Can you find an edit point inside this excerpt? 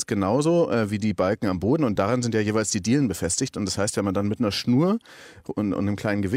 no; 0 cuts

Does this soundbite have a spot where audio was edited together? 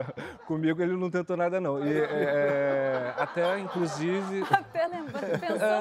no; 0 cuts

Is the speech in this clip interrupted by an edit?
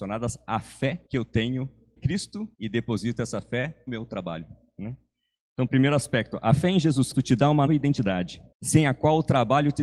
yes; 8 cuts; at 1.1 s, 2.0 s, 2.5 s, 3.9 s, 5.7 s, 7.1 s, 7.7 s, 8.5 s

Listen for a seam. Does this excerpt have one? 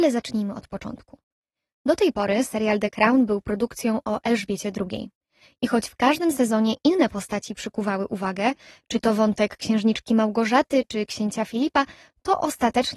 no; 0 cuts

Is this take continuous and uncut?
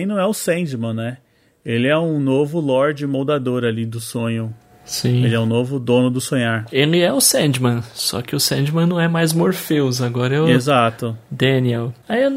yes; 0 cuts

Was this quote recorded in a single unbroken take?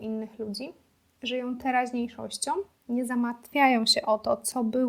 yes; 0 cuts

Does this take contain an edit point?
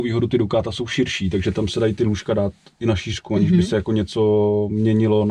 no; 0 cuts

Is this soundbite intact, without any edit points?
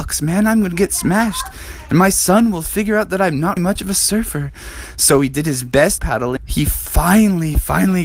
no; 3 cuts; at 3.6 s, 6.0 s, 6.4 s

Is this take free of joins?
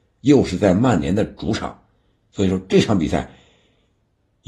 yes; 0 cuts

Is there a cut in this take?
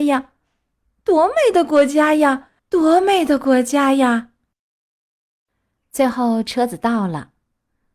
yes; 1 cut; at 2.6 s

